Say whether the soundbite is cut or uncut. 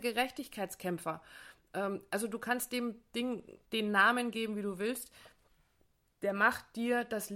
cut